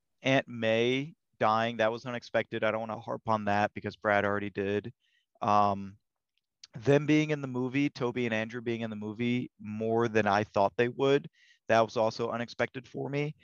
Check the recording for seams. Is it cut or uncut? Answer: uncut